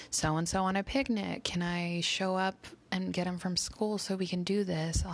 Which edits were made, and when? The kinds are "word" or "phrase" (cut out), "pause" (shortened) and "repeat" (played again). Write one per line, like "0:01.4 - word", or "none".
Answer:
none